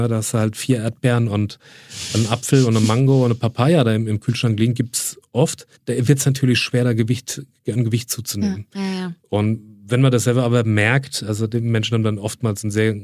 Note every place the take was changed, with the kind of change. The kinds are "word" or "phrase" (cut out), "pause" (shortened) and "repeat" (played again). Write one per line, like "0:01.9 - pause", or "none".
0:05.8 - pause